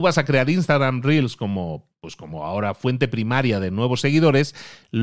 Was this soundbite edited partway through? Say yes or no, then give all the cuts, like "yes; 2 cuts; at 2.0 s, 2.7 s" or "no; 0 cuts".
no; 0 cuts